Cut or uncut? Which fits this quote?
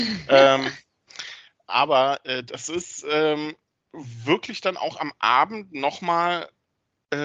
uncut